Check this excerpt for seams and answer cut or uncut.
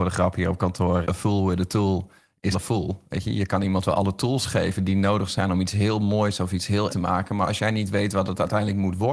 cut